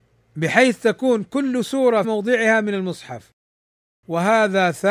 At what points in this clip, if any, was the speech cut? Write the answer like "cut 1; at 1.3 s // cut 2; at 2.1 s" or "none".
cut 1; at 2.0 s